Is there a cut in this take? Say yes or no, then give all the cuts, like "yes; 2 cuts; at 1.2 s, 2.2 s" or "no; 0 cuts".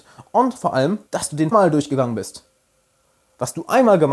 yes; 2 cuts; at 1.1 s, 1.5 s